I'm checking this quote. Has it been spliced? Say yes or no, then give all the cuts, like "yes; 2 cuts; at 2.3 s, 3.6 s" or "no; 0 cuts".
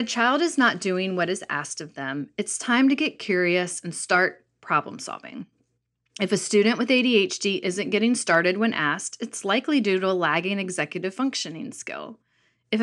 no; 0 cuts